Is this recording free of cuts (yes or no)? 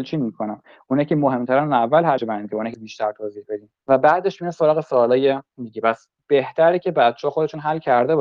no